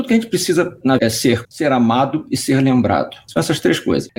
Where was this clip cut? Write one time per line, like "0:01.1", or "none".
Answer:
0:01.0
0:01.4

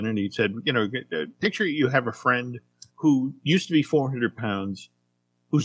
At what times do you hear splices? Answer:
0:02.9

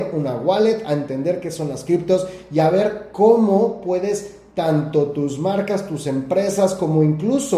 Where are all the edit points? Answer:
none

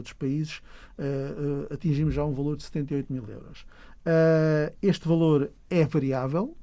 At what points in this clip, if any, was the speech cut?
0:05.6

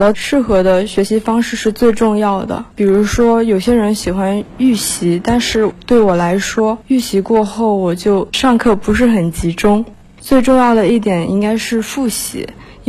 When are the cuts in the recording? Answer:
0:02.7
0:06.8

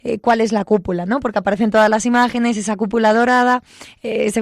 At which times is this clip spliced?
none

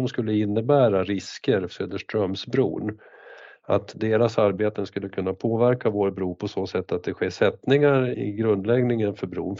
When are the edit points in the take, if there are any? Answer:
0:01.7

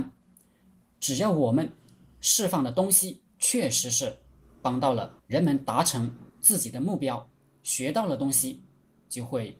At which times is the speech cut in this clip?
0:03.3
0:05.2
0:06.3

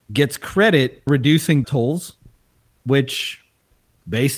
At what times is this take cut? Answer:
0:01.1
0:01.6

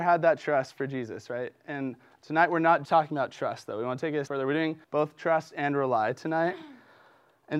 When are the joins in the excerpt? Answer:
0:02.8
0:04.3
0:04.8

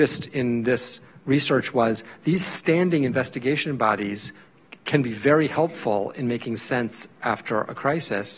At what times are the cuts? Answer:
0:04.8

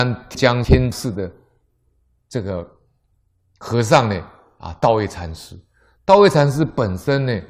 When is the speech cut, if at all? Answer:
none

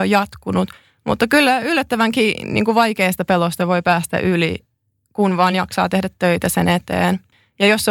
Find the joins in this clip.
none

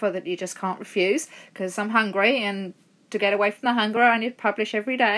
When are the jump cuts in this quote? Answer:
none

